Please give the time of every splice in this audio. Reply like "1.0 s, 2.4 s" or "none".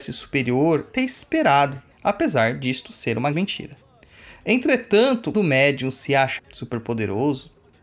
0.9 s, 1.9 s, 3.3 s, 5.3 s, 6.4 s